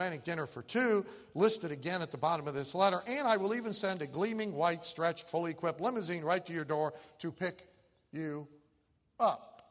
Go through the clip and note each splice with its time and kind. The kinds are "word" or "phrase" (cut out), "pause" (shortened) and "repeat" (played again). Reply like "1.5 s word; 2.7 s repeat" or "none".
none